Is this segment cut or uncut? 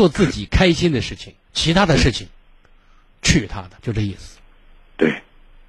cut